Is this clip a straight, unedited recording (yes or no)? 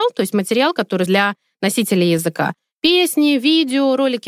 no